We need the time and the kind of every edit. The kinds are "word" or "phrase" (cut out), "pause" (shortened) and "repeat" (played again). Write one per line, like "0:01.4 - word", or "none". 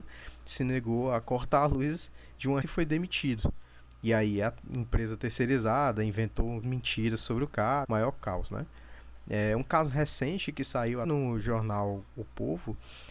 0:02.6 - word
0:06.6 - word
0:07.8 - word
0:11.0 - word